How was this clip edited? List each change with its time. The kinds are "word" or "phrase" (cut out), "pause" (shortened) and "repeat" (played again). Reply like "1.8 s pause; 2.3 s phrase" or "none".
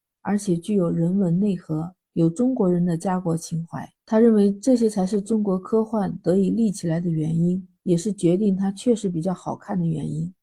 2.1 s pause; 3.9 s pause; 7.8 s pause